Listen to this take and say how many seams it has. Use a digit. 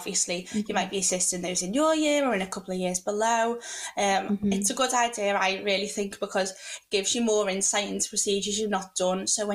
0